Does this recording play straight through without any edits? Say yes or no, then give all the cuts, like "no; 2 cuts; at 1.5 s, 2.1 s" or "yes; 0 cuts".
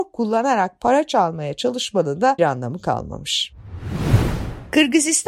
no; 1 cut; at 2.4 s